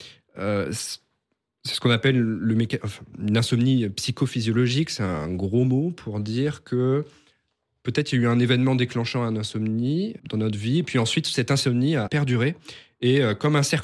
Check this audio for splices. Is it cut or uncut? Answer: cut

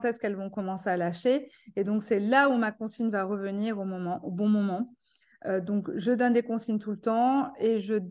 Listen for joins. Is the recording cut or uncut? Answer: uncut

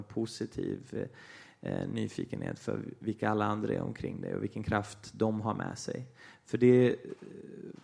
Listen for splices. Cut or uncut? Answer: uncut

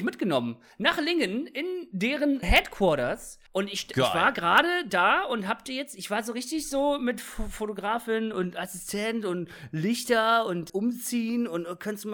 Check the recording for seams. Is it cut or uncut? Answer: cut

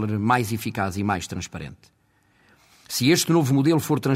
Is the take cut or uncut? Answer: uncut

